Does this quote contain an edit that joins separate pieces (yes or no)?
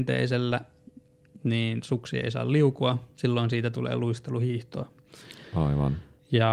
no